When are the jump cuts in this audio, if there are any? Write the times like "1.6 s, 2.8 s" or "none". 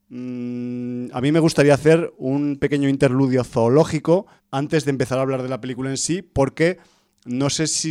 4.4 s